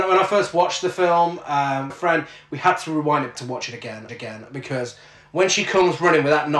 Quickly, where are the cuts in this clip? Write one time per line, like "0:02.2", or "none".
0:01.9
0:03.3
0:04.1